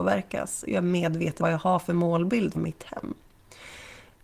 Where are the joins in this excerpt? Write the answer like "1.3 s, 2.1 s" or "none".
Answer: 1.4 s, 2.5 s